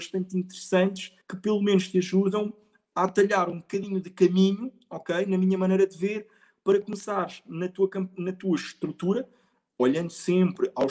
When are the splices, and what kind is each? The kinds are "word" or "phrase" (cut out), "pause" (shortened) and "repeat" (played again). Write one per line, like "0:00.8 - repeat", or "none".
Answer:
0:01.2 - pause